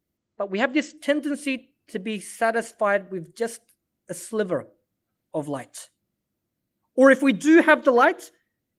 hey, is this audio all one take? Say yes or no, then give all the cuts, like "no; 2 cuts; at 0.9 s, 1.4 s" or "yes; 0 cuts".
yes; 0 cuts